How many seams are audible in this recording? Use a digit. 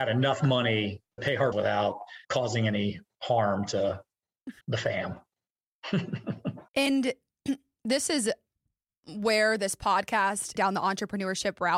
6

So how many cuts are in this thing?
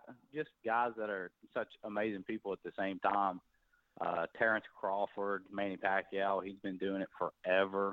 0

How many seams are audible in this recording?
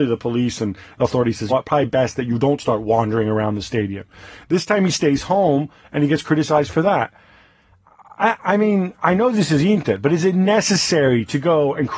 1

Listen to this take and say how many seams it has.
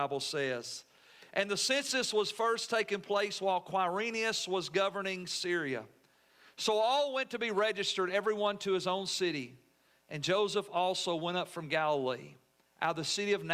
0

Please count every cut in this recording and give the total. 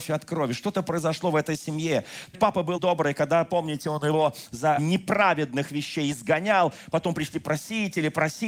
3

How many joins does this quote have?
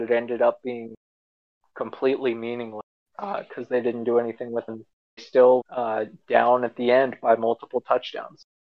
4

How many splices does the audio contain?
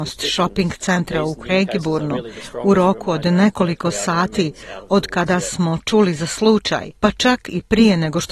1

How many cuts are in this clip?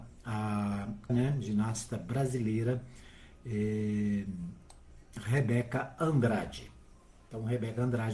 2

